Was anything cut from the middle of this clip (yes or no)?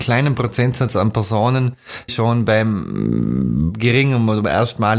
yes